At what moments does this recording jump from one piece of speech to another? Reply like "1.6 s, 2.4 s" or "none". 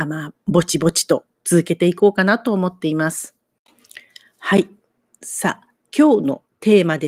none